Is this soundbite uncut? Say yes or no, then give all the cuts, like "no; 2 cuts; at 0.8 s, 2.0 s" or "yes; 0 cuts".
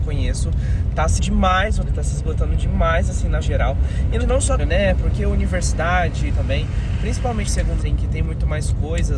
no; 8 cuts; at 1.2 s, 1.9 s, 3.4 s, 4.2 s, 4.6 s, 6.3 s, 7.5 s, 7.8 s